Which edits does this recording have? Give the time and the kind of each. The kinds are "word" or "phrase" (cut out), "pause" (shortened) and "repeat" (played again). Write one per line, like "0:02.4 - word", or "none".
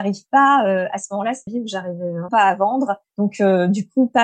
0:01.5 - phrase
0:02.3 - word
0:03.1 - pause